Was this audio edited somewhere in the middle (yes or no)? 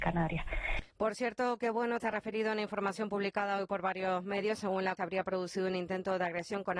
yes